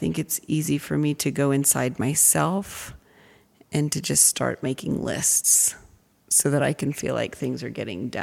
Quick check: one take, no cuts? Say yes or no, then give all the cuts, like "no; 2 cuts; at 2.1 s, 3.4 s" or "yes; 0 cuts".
yes; 0 cuts